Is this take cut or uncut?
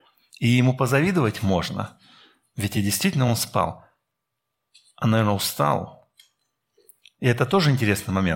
uncut